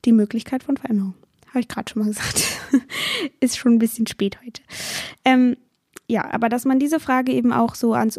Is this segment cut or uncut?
uncut